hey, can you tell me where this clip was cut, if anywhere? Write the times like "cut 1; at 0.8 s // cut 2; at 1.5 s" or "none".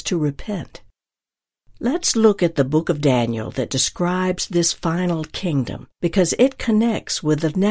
cut 1; at 5.9 s